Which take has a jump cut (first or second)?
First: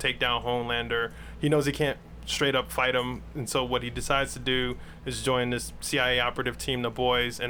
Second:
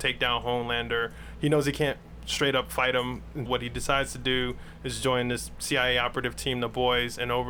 second